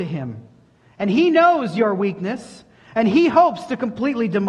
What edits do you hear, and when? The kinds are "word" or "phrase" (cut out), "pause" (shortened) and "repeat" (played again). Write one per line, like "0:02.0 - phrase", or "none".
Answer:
none